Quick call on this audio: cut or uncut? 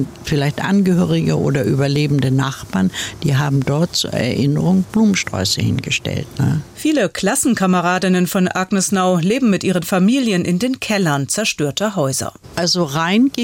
uncut